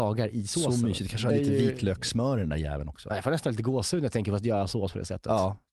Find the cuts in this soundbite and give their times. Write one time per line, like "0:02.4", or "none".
0:01.3